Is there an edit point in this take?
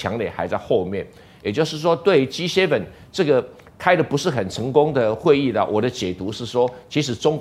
no; 0 cuts

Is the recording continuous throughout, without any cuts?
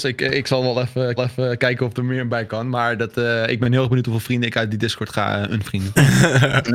no; 1 cut; at 1.2 s

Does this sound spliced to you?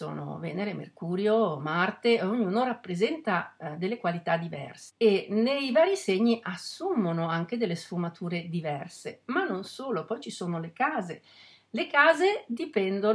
no; 0 cuts

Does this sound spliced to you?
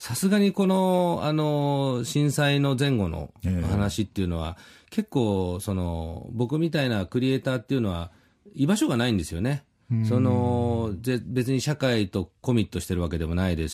no; 0 cuts

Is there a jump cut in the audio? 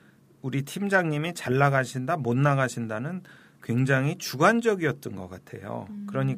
no; 0 cuts

